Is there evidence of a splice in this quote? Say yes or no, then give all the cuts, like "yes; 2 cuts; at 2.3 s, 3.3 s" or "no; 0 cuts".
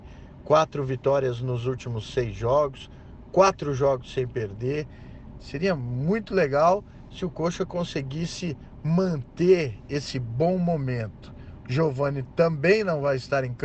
no; 0 cuts